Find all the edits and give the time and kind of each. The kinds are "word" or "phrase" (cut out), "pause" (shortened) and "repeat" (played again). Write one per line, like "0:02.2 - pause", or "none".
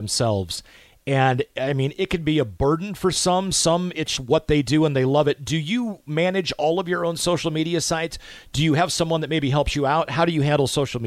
0:04.2 - word